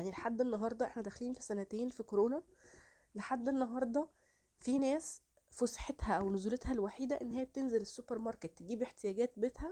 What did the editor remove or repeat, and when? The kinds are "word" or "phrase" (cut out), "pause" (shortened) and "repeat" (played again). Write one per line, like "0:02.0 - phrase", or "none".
none